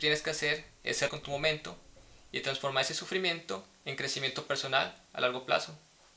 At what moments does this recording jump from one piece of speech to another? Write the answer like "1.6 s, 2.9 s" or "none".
1.1 s